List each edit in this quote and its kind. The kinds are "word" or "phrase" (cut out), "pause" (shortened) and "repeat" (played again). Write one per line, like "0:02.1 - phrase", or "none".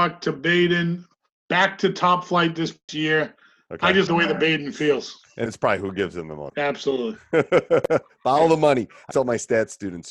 0:02.9 - word
0:04.1 - word
0:05.5 - word
0:09.1 - word